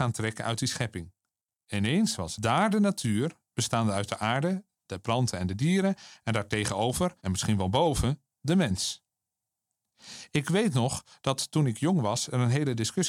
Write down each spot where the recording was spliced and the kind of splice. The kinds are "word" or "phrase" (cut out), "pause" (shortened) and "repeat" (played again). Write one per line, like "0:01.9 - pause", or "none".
0:07.2 - pause